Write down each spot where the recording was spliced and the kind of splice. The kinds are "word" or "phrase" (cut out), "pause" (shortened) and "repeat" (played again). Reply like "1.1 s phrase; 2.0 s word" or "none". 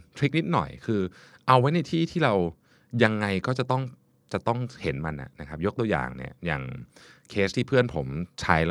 none